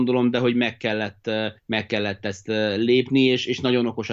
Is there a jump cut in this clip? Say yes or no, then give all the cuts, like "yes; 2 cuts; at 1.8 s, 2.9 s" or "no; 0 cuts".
yes; 1 cut; at 1.6 s